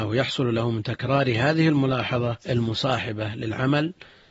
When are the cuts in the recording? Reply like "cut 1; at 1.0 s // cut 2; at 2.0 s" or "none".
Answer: cut 1; at 2.4 s